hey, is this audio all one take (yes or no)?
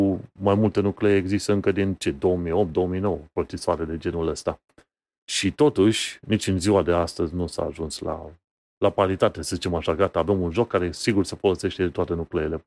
yes